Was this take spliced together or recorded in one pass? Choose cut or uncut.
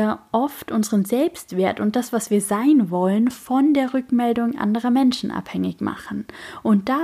uncut